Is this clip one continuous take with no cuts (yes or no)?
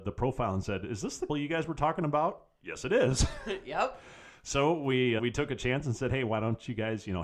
no